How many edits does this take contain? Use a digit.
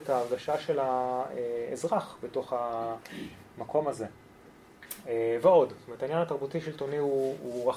0